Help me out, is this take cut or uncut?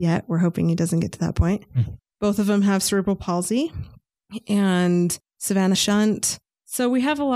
cut